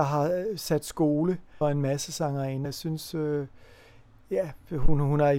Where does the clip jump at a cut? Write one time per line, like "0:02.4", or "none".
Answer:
0:01.6
0:02.6